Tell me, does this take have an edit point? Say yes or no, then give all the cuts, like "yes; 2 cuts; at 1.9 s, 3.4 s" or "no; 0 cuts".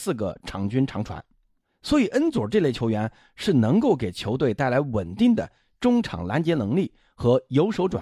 no; 0 cuts